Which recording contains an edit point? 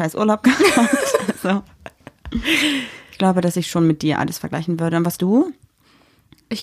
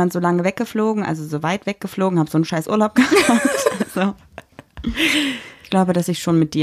first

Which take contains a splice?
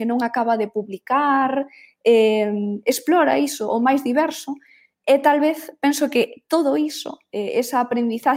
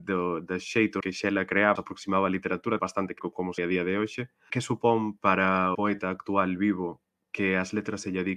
second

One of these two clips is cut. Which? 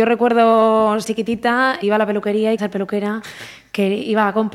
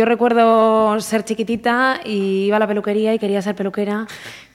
first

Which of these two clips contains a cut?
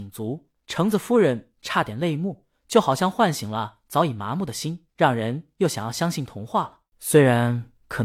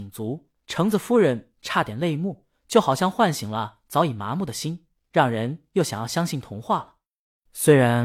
first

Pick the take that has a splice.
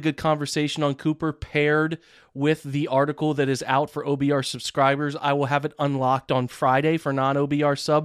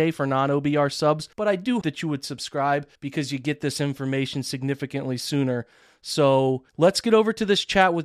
second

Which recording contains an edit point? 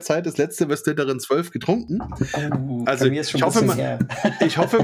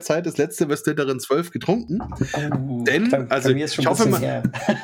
first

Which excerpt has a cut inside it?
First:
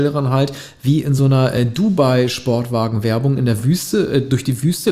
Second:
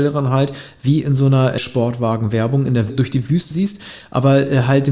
second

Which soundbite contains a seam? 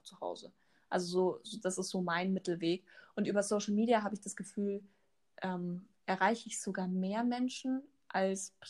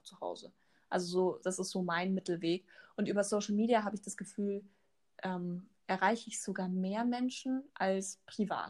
second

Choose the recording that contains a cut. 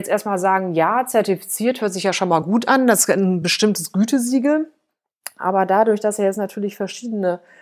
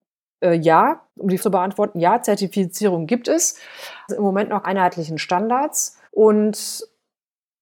second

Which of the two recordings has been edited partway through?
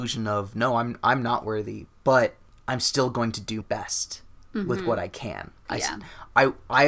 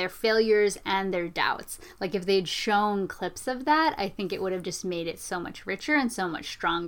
first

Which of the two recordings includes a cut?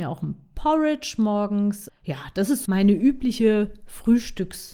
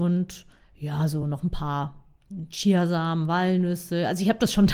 first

